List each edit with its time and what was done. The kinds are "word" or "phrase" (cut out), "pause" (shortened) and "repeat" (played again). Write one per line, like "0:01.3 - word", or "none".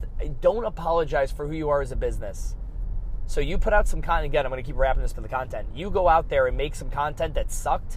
0:05.1 - word